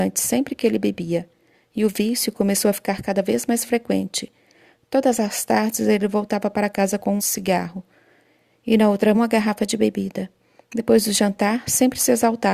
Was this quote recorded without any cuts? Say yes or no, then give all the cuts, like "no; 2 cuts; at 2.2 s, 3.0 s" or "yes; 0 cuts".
no; 2 cuts; at 7.2 s, 9.1 s